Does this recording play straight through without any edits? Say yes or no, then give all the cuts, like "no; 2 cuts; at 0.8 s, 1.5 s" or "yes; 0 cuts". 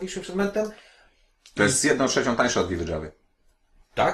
yes; 0 cuts